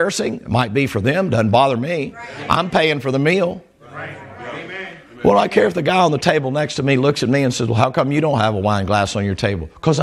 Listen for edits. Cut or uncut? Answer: uncut